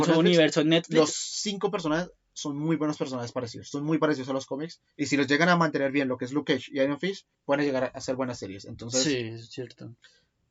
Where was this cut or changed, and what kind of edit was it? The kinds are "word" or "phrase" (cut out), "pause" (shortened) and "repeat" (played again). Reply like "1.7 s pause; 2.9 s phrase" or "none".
7.3 s pause